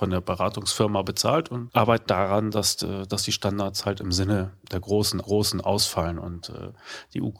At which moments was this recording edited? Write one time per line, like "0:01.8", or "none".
0:01.7
0:02.1
0:05.2